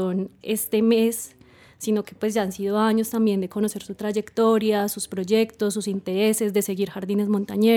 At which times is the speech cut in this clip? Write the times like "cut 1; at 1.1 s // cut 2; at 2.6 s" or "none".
none